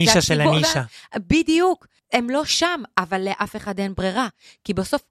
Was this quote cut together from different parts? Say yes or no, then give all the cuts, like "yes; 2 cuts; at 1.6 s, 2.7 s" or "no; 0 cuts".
no; 0 cuts